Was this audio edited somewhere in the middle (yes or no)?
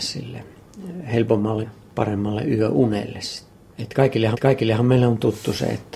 yes